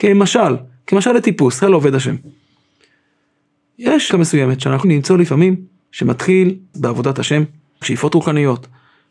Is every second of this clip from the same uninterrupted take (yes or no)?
no